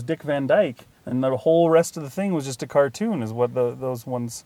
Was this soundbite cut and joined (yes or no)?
yes